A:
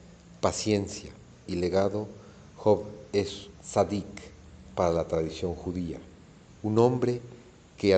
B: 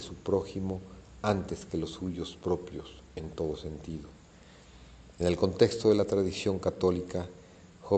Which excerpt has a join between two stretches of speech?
A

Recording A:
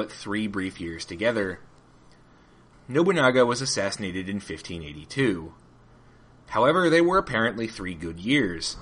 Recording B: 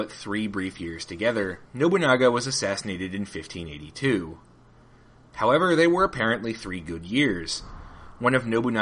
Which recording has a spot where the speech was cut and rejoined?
B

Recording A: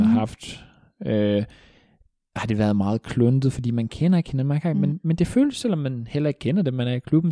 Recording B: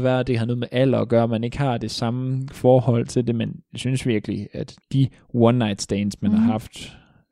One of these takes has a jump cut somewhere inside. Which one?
B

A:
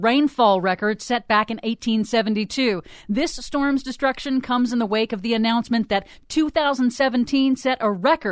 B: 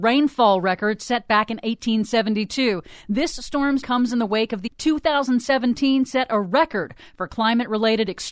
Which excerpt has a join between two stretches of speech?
B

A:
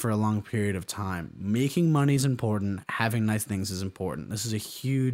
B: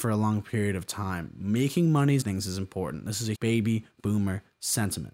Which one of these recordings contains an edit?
B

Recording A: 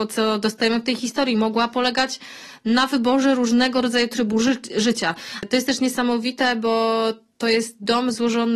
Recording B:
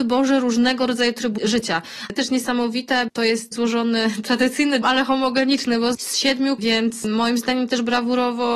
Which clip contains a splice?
B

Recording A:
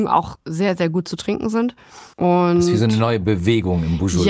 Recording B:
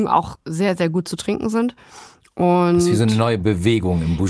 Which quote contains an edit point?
A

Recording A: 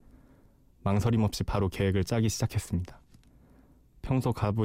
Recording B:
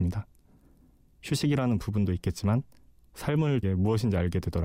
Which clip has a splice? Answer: B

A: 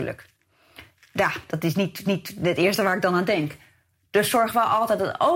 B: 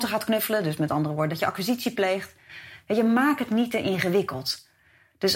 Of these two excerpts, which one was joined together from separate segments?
A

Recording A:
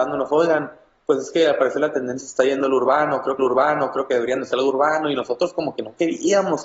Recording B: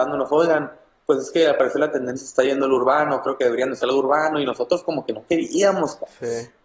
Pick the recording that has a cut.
A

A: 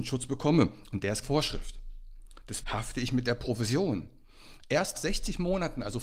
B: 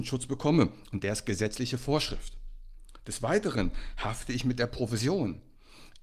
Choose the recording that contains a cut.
A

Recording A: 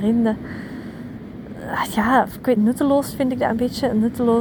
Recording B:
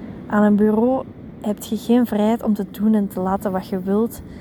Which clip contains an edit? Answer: A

